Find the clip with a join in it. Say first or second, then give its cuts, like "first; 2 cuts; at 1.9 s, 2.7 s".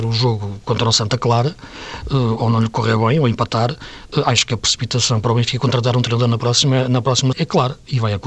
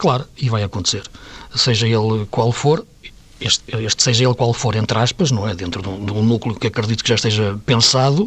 first; 1 cut; at 7.3 s